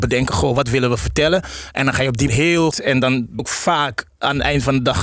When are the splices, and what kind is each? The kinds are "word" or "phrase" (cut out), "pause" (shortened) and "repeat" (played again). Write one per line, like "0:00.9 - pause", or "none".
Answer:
0:02.3 - word
0:02.7 - word
0:03.4 - word